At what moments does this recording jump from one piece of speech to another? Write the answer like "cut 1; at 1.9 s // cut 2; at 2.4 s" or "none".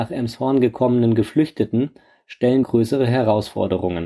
cut 1; at 2.6 s